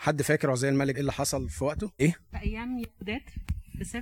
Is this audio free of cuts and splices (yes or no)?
no